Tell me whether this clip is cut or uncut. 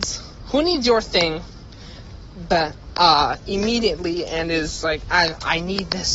uncut